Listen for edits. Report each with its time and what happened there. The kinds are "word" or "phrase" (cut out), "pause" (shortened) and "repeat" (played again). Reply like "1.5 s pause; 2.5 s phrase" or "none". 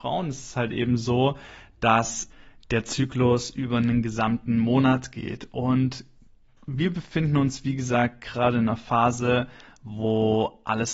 none